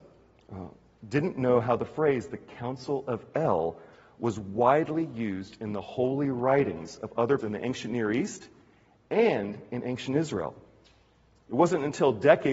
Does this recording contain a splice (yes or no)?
yes